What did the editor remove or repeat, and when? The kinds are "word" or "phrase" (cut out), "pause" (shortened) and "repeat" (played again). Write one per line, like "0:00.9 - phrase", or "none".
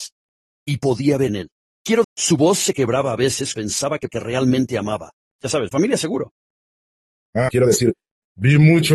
0:01.3 - word
0:02.0 - word
0:03.5 - word
0:04.1 - word
0:05.7 - word
0:07.5 - word